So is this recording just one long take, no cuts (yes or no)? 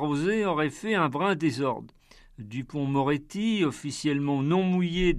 yes